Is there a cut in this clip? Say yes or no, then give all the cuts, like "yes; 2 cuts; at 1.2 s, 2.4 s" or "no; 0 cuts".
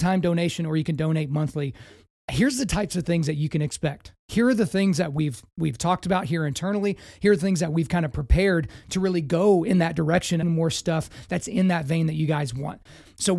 yes; 1 cut; at 10.4 s